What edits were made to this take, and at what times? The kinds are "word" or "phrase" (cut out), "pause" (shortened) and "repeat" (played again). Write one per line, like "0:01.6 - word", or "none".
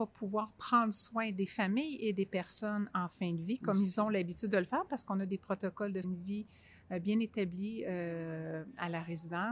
0:06.0 - word